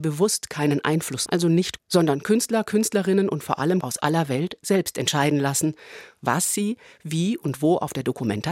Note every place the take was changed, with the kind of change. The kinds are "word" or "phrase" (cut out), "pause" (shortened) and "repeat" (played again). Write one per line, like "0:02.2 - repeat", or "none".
0:01.3 - word
0:01.8 - word
0:03.8 - word